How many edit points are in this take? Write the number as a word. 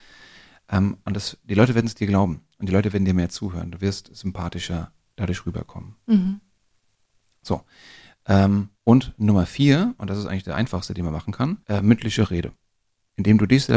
two